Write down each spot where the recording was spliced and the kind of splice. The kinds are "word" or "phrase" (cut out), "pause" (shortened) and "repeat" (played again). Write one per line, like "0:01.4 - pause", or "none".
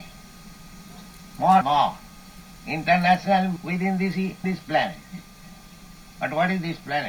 0:01.6 - word
0:03.6 - word
0:04.4 - word